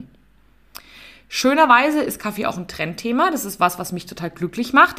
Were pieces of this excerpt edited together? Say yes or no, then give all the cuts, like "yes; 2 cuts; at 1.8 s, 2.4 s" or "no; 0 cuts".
no; 0 cuts